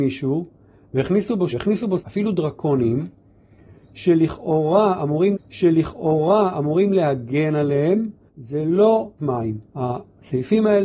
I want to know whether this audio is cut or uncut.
cut